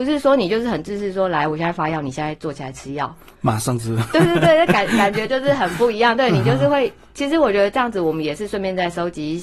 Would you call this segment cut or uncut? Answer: uncut